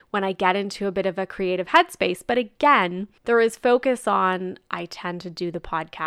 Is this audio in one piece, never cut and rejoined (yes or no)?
no